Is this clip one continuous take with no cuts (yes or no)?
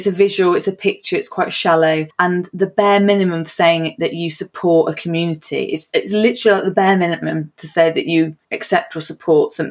no